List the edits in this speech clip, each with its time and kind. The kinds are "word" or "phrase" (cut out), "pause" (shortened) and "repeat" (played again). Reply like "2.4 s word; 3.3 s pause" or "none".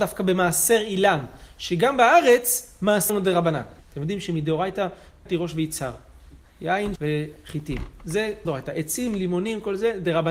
3.1 s word; 3.8 s pause; 5.3 s phrase; 7.0 s word; 8.4 s word